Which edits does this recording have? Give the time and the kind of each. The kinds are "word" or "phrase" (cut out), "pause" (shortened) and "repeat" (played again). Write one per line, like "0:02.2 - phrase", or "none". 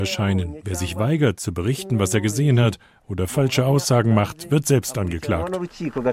none